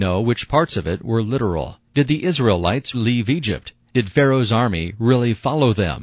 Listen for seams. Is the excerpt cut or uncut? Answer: cut